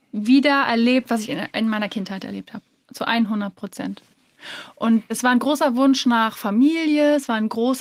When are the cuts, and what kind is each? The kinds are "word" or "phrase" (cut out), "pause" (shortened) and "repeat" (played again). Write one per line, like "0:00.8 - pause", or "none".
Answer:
none